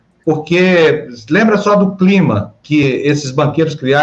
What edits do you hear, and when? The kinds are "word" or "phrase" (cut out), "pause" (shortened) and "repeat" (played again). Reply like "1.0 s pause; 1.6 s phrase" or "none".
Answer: none